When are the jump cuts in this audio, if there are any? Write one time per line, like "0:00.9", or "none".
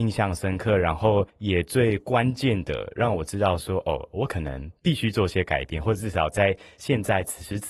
0:01.3
0:04.8